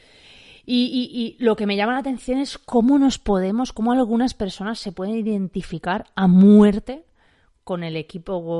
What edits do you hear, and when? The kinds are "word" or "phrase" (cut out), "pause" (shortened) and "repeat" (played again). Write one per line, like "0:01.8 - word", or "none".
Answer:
none